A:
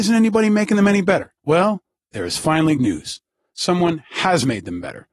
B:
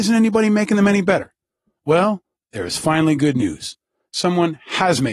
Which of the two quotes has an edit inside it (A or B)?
A